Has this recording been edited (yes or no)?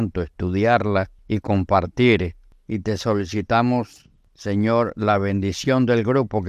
yes